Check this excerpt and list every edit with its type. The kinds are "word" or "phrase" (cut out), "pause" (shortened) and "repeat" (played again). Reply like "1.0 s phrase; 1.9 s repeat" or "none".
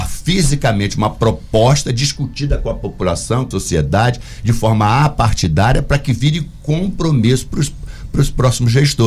3.5 s word